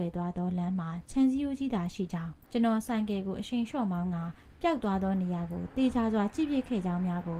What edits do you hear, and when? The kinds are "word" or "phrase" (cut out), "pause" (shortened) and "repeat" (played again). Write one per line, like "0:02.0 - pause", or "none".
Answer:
0:02.4 - pause